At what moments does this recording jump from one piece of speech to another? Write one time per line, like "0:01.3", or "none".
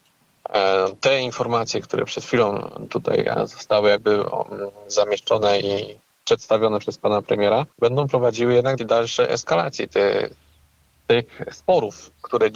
0:07.7
0:08.8